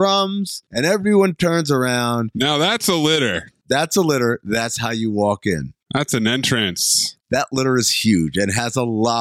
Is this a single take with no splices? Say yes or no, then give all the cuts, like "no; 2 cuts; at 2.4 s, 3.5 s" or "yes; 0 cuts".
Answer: yes; 0 cuts